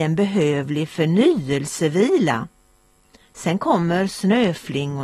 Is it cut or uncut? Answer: uncut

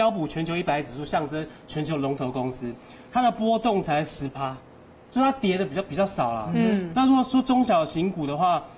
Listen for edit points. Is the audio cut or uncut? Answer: uncut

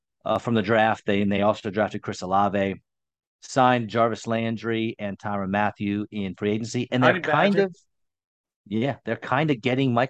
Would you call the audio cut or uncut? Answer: uncut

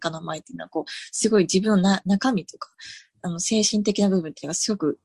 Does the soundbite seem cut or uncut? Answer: uncut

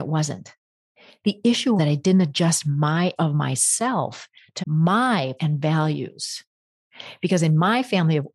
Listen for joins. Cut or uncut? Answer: cut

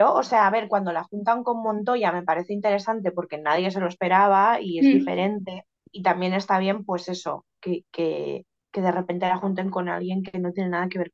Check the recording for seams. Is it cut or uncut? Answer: uncut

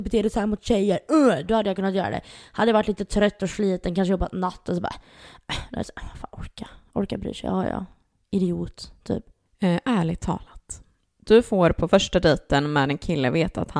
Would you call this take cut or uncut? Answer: uncut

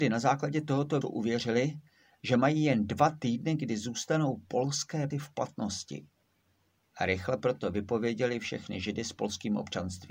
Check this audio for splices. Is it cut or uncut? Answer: cut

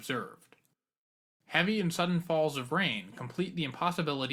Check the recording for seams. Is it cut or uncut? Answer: uncut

